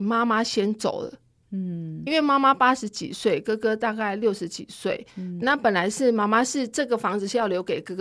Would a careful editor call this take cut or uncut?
cut